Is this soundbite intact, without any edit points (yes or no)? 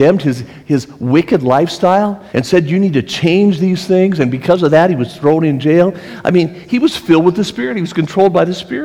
no